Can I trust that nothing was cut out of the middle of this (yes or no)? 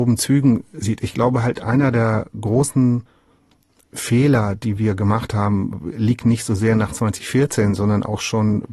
yes